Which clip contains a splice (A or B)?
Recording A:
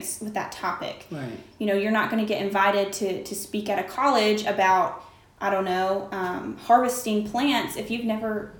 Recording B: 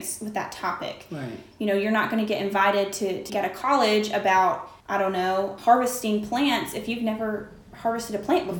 B